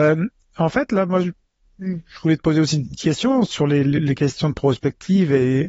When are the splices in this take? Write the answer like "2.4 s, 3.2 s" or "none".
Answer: none